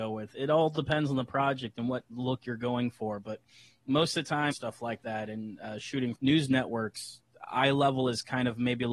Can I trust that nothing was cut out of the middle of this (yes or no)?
no